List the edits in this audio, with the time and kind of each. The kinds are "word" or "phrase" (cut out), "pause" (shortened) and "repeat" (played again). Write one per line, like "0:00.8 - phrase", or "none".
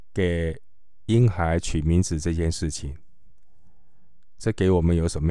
0:04.4 - phrase